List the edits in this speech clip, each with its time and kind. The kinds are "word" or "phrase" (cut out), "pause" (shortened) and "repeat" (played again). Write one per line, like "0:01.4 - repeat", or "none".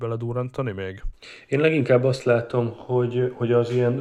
none